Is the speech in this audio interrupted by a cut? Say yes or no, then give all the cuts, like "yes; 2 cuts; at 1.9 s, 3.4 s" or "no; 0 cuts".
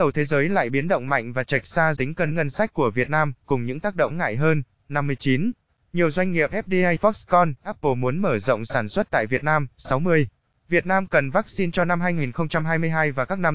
yes; 5 cuts; at 2.0 s, 2.3 s, 4.1 s, 7.0 s, 7.6 s